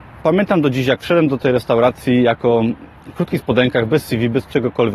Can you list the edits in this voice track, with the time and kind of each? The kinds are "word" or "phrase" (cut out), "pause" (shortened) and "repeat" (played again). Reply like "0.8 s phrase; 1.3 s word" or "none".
none